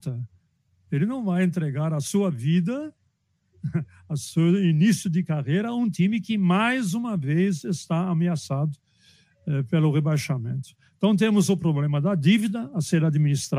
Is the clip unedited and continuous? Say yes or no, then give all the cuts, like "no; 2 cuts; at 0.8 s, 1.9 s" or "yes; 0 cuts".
yes; 0 cuts